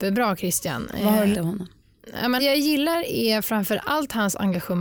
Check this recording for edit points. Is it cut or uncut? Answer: cut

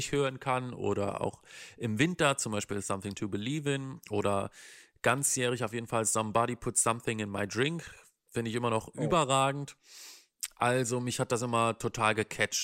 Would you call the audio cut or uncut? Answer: uncut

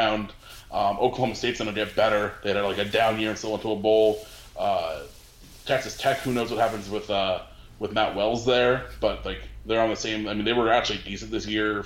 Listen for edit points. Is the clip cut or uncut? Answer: uncut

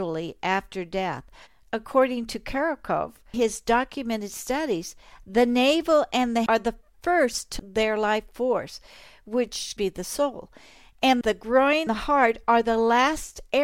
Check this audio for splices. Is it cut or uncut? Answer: cut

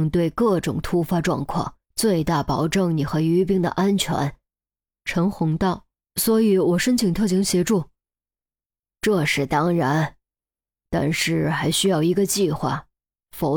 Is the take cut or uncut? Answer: cut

